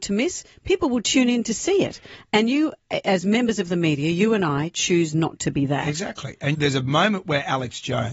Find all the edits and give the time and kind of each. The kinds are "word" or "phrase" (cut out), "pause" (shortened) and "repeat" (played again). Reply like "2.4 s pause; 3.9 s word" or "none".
6.5 s word